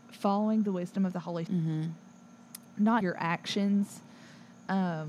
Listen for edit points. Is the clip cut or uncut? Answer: cut